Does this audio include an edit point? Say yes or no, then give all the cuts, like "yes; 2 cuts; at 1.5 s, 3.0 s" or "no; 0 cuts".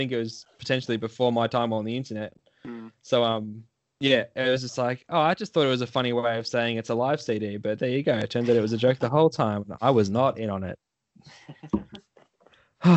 no; 0 cuts